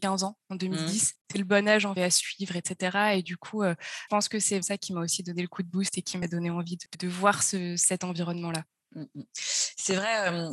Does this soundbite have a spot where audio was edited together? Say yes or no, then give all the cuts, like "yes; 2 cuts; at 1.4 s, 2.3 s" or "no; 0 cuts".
yes; 5 cuts; at 1.2 s, 2.0 s, 4.1 s, 4.6 s, 6.9 s